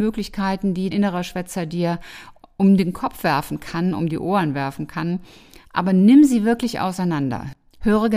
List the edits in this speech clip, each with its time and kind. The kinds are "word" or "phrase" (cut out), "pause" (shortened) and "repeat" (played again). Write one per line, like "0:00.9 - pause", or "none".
0:00.9 - word